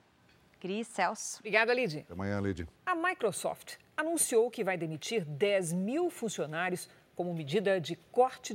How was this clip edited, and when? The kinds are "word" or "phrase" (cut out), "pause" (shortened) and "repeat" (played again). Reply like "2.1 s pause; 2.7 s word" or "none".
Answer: 2.8 s pause